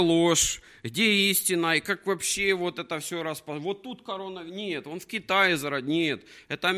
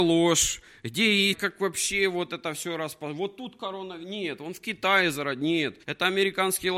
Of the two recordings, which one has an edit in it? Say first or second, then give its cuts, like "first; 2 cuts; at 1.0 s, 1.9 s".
second; 2 cuts; at 1.3 s, 5.8 s